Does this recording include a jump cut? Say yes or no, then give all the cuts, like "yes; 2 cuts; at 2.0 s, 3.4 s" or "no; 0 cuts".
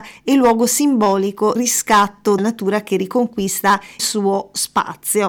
yes; 3 cuts; at 1.5 s, 2.4 s, 4.0 s